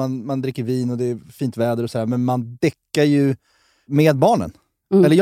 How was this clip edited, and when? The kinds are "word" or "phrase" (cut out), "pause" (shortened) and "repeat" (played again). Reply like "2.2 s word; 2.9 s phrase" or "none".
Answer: none